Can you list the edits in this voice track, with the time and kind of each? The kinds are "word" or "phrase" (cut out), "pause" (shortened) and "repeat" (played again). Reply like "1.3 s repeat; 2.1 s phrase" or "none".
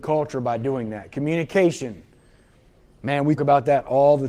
3.4 s word